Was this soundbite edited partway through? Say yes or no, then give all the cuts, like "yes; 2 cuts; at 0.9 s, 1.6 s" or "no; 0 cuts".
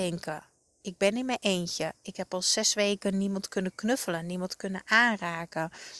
no; 0 cuts